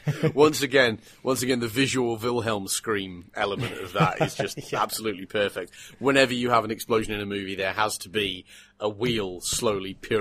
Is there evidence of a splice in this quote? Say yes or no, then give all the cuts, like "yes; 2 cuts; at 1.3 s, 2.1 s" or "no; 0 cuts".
no; 0 cuts